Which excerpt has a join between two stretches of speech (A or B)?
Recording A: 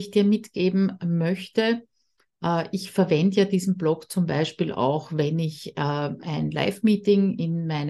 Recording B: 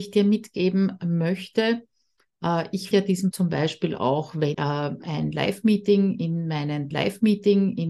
B